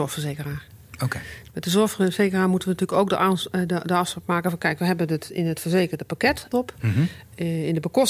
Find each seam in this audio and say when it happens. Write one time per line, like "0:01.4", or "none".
0:06.5